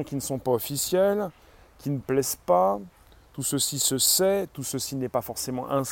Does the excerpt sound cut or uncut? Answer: uncut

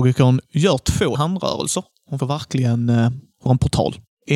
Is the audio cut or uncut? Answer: cut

